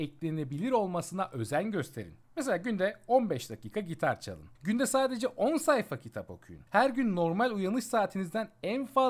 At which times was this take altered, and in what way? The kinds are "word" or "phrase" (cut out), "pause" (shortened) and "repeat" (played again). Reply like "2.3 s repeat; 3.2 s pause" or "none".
2.2 s pause; 4.6 s pause; 6.7 s pause